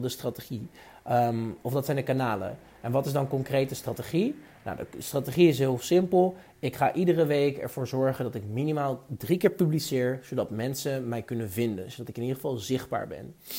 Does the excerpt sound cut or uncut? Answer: uncut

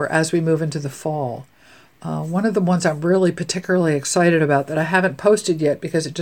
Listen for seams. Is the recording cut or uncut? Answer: uncut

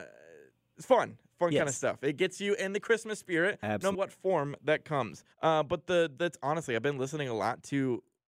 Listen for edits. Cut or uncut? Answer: cut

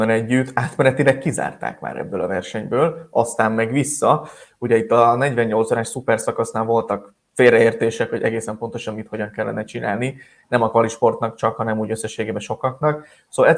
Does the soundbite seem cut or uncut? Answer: uncut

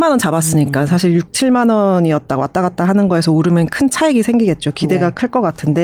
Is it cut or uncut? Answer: uncut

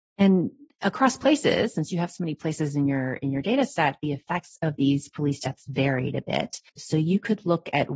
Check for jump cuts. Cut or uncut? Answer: cut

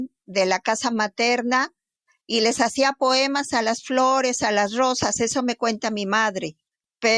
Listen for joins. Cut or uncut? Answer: uncut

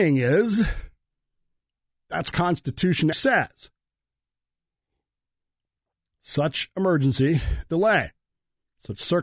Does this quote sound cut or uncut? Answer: cut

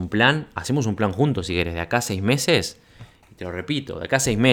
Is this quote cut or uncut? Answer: uncut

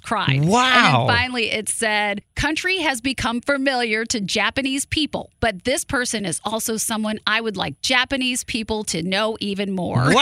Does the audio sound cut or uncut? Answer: uncut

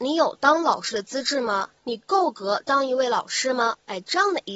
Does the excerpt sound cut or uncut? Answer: cut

